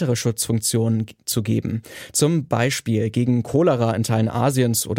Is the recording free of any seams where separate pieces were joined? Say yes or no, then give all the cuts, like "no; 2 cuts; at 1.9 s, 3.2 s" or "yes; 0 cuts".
yes; 0 cuts